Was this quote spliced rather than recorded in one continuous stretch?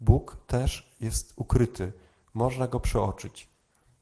no; 0 cuts

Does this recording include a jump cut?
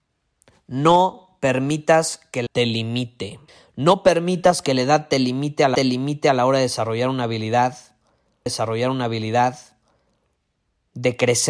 yes; 4 cuts; at 2.5 s, 3.5 s, 5.7 s, 8.5 s

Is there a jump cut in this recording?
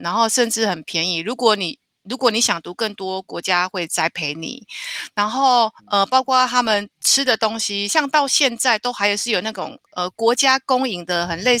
no; 0 cuts

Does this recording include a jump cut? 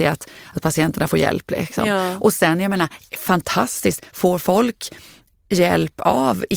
no; 0 cuts

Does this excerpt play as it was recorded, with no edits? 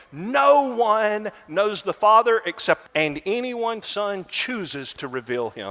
no; 2 cuts; at 2.9 s, 3.8 s

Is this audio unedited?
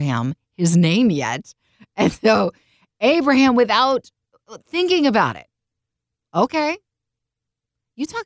yes; 0 cuts

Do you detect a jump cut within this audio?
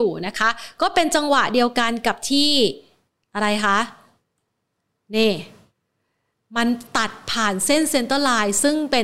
no; 0 cuts

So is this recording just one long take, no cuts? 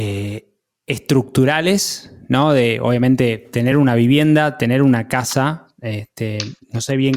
yes; 0 cuts

